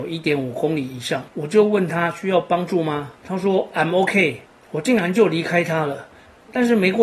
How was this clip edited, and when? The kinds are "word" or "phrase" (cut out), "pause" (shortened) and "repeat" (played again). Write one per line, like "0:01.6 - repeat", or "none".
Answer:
0:01.3 - pause
0:03.2 - pause
0:04.4 - pause